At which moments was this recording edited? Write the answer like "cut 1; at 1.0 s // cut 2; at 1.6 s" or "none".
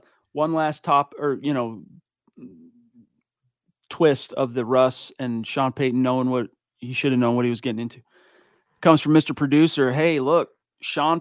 none